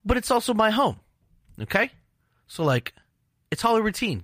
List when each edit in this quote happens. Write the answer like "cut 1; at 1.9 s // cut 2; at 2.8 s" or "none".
none